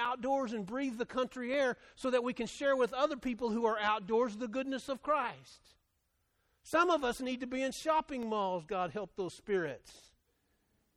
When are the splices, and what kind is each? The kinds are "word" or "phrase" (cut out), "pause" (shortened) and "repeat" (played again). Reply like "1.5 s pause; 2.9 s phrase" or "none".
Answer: none